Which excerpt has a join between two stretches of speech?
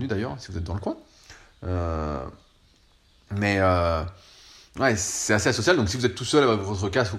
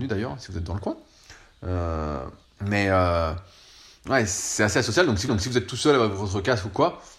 second; 2 cuts; at 2.4 s, 5.3 s

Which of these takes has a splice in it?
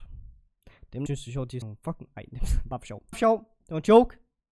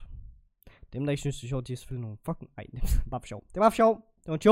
first; 3 cuts; at 1.1 s, 1.6 s, 3.1 s

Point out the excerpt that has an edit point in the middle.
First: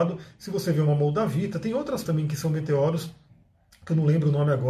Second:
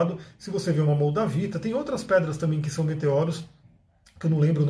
first; 1 cut; at 2.0 s

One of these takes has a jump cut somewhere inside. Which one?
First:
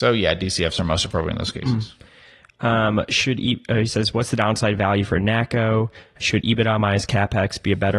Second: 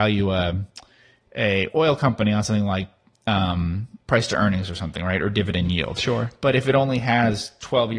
first; 1 cut; at 6.2 s

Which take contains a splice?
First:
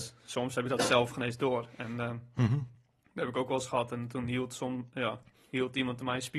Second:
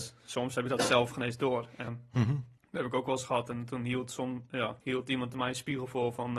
second; 3 cuts; at 1.9 s, 2.6 s, 4.8 s

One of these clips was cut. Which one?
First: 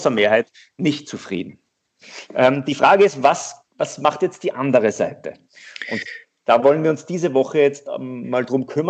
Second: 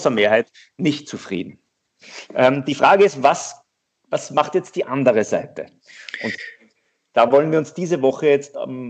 first; 2 cuts; at 3.7 s, 6.2 s

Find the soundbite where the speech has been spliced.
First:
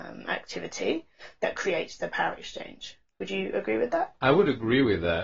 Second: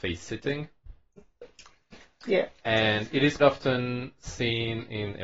second; 2 cuts; at 2.6 s, 3.4 s

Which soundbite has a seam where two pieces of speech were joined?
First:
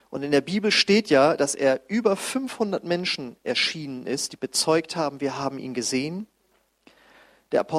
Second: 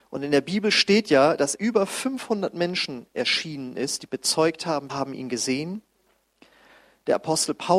second; 2 cuts; at 1.6 s, 4.9 s

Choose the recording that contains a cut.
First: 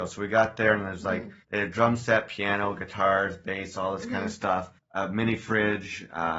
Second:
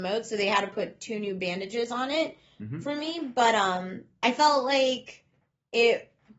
first; 2 cuts; at 1.4 s, 4.8 s

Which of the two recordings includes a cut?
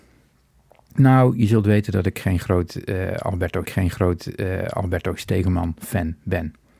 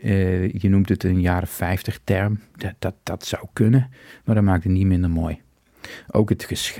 first; 1 cut; at 3.7 s

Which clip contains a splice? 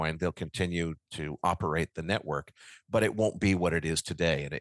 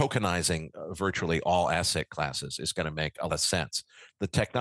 second; 1 cut; at 3.3 s

